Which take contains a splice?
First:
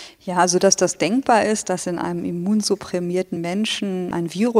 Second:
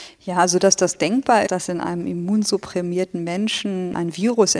second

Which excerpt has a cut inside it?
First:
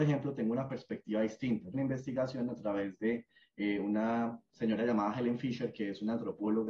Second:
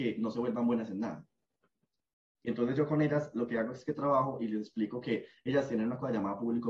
first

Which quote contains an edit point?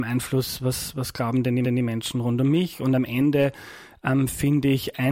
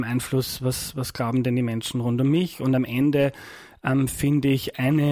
first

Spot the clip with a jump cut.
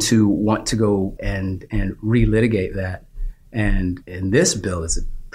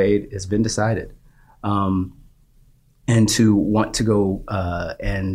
first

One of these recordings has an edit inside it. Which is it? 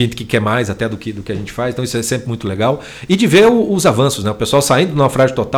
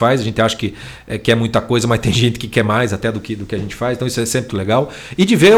second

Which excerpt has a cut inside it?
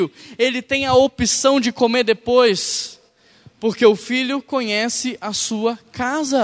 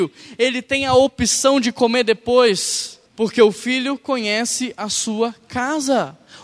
second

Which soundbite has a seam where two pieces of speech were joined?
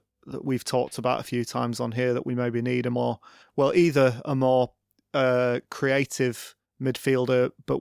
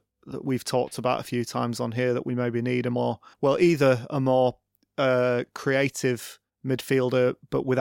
second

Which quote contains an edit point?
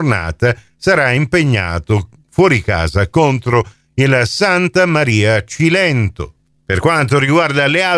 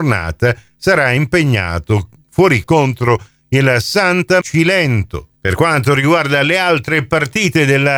second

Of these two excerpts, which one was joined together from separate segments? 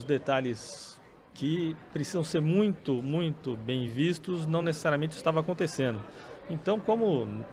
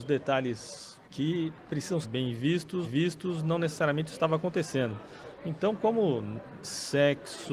second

